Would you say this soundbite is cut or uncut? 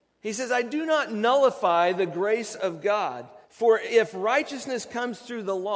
cut